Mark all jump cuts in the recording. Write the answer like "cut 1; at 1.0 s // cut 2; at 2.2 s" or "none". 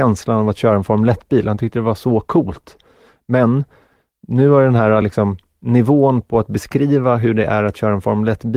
none